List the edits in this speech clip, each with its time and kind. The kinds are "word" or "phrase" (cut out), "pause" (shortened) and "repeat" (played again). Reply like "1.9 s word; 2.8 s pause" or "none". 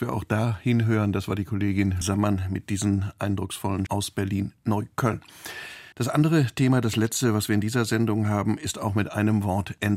2.0 s word; 3.9 s word; 5.9 s pause